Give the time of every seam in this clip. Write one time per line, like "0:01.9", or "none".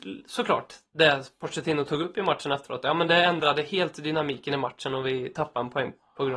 none